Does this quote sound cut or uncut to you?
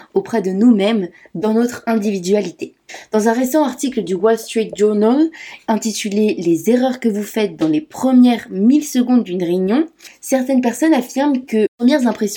uncut